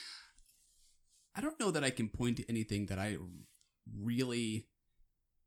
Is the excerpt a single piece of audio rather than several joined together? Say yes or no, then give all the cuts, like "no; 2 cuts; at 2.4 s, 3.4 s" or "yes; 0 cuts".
yes; 0 cuts